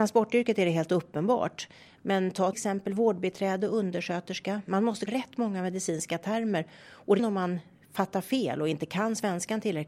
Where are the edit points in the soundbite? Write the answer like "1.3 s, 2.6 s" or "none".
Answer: 2.5 s, 5.1 s, 7.2 s